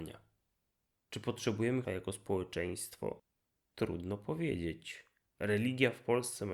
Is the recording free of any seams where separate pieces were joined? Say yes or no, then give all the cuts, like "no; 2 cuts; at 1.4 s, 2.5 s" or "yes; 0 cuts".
no; 2 cuts; at 1.8 s, 5.3 s